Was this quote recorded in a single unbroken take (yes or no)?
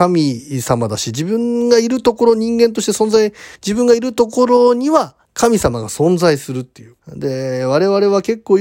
no